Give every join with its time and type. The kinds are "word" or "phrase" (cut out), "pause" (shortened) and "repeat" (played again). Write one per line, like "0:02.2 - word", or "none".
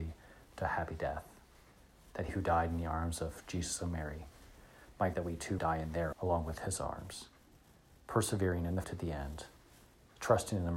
0:02.3 - word
0:05.1 - word
0:05.6 - word
0:06.1 - word
0:08.8 - word